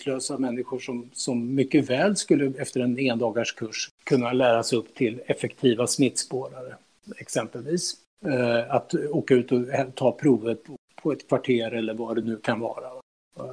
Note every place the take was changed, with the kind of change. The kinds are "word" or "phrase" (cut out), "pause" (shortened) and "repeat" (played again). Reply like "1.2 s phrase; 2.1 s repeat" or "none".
none

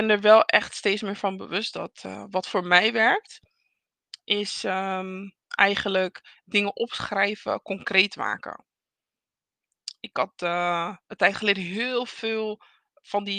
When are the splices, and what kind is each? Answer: 5.4 s pause; 11.0 s pause

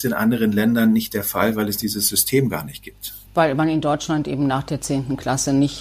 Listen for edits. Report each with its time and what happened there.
3.3 s pause

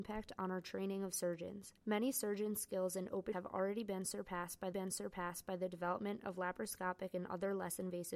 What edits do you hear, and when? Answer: 3.3 s word; 4.7 s repeat

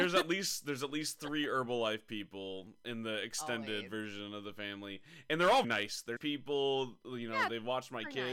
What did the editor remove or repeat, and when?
5.6 s word; 6.2 s word

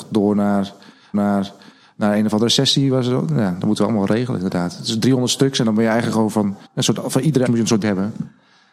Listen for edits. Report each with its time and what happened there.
1.1 s repeat; 6.6 s pause; 7.5 s word; 7.8 s word

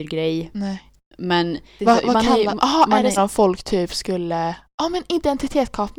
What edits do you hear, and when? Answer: 1.8 s phrase; 3.2 s word

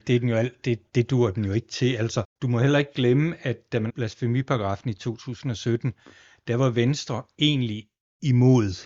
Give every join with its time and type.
3.9 s word

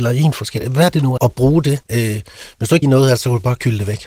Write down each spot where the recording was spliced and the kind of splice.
1.2 s word; 1.8 s pause; 2.8 s phrase

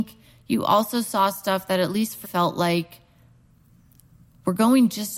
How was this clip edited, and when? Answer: 2.2 s word

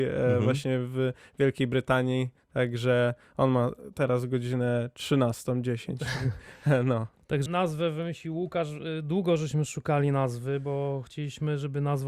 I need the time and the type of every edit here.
7.5 s word

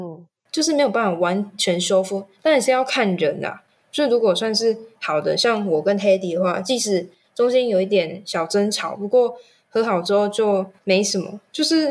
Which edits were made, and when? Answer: none

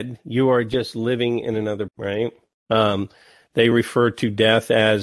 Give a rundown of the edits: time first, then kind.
1.9 s word

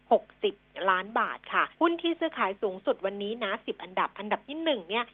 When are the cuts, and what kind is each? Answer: 1.7 s pause

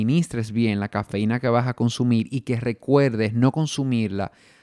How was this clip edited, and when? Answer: none

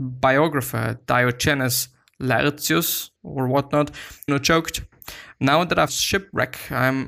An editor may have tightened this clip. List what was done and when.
3.2 s pause; 4.3 s word; 5.9 s word

